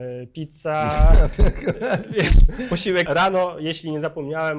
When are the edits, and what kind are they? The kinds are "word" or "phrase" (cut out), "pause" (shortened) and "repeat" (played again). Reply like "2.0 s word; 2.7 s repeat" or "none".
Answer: 3.1 s word